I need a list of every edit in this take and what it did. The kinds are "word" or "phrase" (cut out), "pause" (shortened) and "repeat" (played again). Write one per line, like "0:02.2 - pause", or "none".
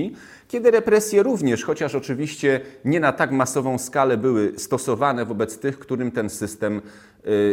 none